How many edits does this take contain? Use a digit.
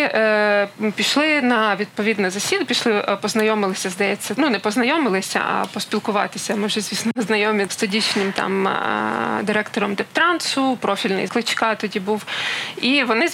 3